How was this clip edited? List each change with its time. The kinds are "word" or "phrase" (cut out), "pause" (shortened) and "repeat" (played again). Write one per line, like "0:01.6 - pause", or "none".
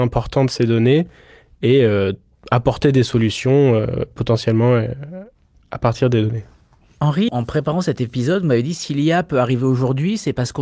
0:07.3 - word